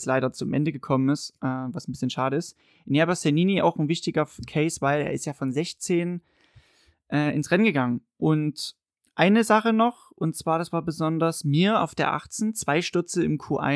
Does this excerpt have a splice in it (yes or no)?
no